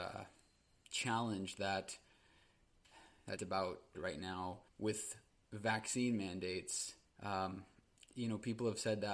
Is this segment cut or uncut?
cut